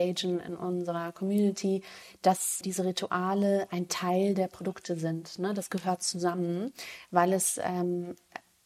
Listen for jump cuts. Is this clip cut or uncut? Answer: cut